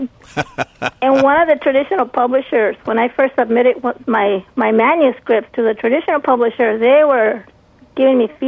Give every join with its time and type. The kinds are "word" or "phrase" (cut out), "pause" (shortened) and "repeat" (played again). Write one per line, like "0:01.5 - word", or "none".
none